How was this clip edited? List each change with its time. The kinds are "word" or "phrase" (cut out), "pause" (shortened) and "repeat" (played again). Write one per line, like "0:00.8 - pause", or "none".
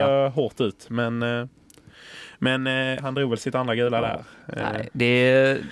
0:03.0 - word